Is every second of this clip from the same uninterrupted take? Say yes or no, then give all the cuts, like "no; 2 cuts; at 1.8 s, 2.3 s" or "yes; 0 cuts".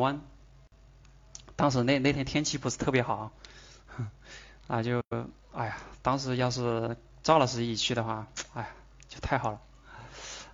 yes; 0 cuts